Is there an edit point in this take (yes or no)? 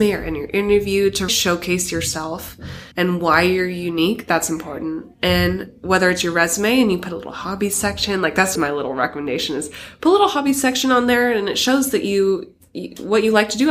yes